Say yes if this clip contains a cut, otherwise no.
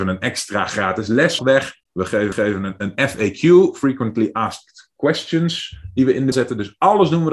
yes